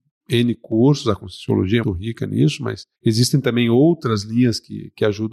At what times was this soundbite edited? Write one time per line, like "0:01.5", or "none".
0:01.8
0:03.0